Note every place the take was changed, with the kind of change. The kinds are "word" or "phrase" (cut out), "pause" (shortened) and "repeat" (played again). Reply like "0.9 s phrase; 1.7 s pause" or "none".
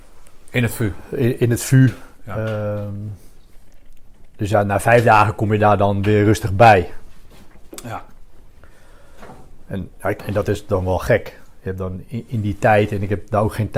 10.2 s word